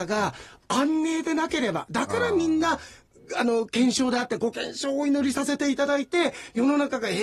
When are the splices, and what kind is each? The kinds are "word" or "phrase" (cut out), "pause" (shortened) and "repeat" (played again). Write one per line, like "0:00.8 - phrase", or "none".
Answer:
none